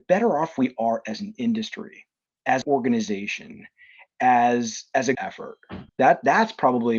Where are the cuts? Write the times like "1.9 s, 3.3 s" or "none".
2.6 s, 5.1 s, 5.9 s